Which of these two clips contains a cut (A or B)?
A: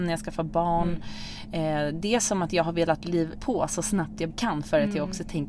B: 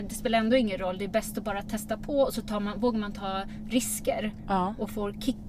A